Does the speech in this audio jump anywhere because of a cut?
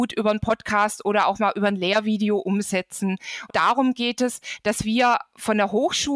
yes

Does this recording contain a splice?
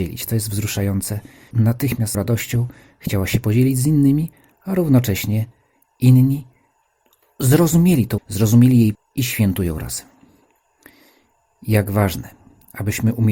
yes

